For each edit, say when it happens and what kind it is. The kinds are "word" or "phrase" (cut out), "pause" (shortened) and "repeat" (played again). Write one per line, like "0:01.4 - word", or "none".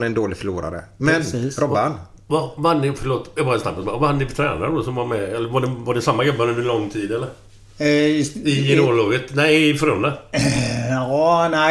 none